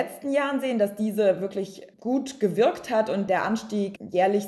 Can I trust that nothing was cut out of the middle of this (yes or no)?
no